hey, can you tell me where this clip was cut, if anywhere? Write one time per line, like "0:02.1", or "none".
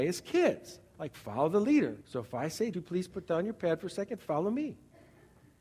0:02.0
0:02.7